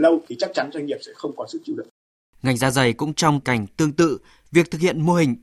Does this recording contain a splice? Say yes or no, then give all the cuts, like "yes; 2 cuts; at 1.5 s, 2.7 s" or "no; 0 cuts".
yes; 1 cut; at 3.4 s